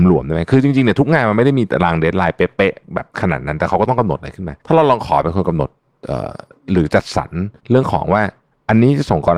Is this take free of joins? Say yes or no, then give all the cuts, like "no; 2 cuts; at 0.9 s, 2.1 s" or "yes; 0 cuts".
no; 3 cuts; at 3.1 s, 4.6 s, 7.6 s